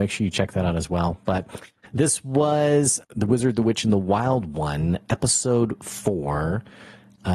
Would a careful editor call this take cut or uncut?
cut